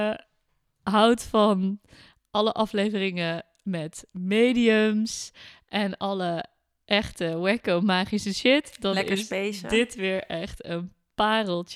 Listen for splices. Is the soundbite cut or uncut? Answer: uncut